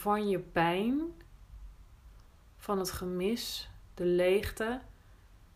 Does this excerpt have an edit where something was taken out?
no; 0 cuts

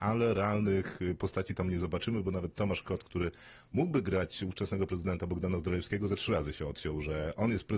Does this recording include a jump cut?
no; 0 cuts

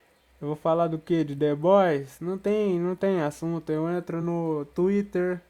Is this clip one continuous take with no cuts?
yes; 0 cuts

